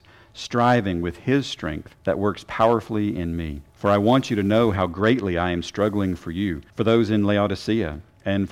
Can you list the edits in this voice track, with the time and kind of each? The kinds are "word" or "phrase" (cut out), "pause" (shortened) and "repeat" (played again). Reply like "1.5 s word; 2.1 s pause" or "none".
2.0 s pause; 3.7 s pause; 6.7 s pause